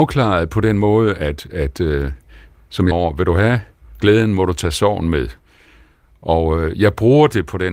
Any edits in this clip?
yes; 1 cut; at 2.9 s

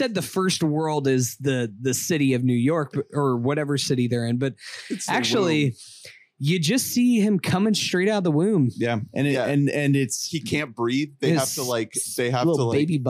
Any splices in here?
no; 0 cuts

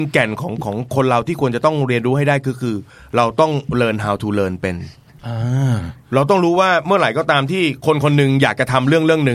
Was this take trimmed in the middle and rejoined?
yes; 1 cut; at 2.9 s

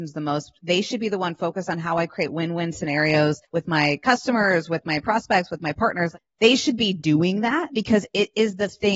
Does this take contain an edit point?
yes; 1 cut; at 3.5 s

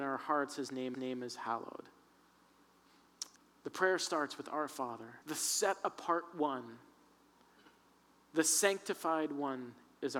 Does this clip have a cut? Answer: yes; 3 cuts; at 0.9 s, 3.4 s, 5.2 s

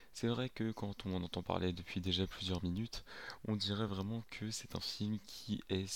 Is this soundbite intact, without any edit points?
yes; 0 cuts

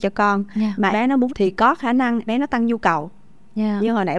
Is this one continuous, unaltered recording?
no; 3 cuts; at 0.9 s, 1.3 s, 2.3 s

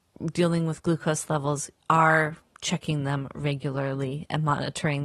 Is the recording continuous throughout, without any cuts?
no; 1 cut; at 1.8 s

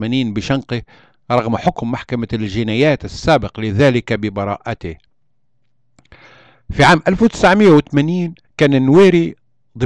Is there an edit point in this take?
yes; 1 cut; at 8.4 s

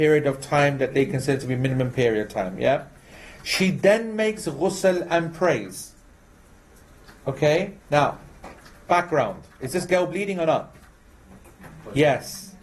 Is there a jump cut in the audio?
yes; 1 cut; at 7.8 s

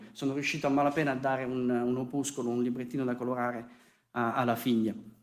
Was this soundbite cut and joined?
no; 0 cuts

